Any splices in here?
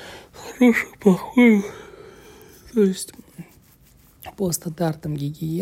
no; 0 cuts

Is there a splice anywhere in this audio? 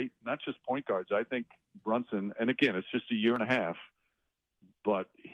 no; 0 cuts

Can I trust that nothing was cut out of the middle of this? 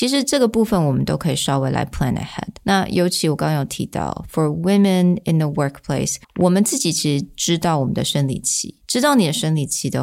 no; 1 cut; at 6.2 s

